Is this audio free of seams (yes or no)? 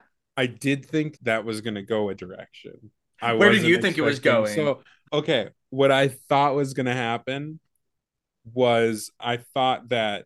no